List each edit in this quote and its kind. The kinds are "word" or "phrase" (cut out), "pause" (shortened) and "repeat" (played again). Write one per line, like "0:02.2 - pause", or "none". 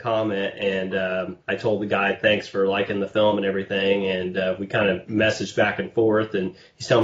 0:01.4 - pause